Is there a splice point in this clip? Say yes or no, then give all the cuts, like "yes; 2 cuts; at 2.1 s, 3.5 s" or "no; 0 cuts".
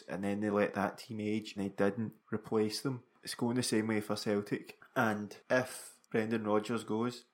yes; 3 cuts; at 1.6 s, 2.2 s, 6.0 s